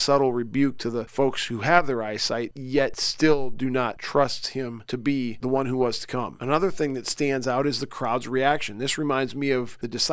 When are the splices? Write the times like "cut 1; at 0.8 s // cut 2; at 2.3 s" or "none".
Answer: none